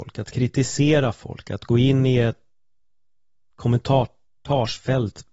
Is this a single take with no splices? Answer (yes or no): yes